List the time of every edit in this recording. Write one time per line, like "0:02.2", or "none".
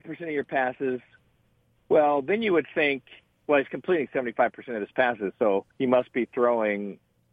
0:05.7

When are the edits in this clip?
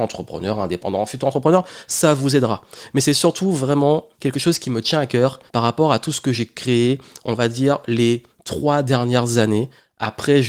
0:04.1
0:05.5

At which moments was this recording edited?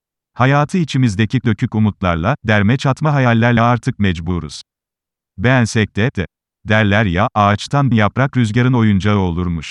0:01.4
0:03.6
0:06.1
0:07.9

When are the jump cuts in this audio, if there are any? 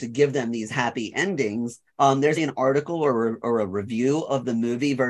0:01.9
0:02.4

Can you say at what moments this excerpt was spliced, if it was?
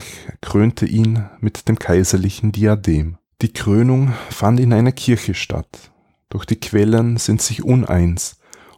0:03.3

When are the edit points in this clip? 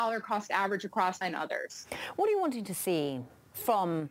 0:01.2

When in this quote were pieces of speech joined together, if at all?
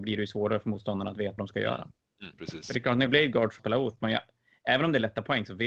0:01.4
0:02.3
0:03.1
0:03.6
0:04.0

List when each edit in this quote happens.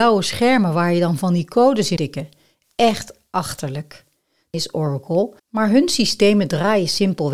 0:02.0
0:04.5
0:05.4

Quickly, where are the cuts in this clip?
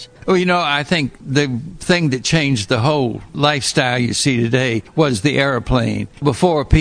none

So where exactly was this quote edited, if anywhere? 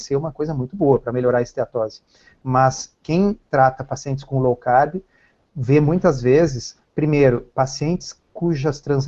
none

